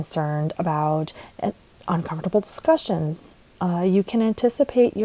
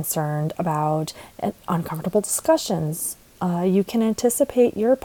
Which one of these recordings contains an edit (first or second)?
second